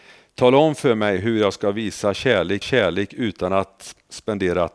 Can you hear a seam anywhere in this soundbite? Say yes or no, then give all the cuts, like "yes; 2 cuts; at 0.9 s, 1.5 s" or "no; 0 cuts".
yes; 1 cut; at 2.6 s